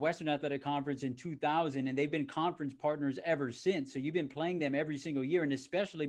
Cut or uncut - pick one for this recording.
uncut